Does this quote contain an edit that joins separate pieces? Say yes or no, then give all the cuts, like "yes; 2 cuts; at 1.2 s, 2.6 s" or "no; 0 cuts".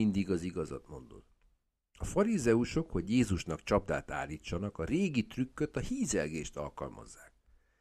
no; 0 cuts